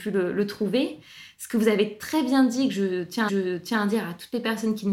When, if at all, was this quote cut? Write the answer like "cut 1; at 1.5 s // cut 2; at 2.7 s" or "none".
cut 1; at 3.3 s